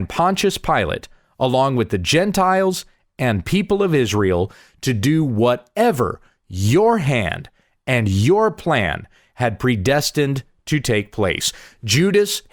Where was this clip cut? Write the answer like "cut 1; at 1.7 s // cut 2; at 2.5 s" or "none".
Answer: none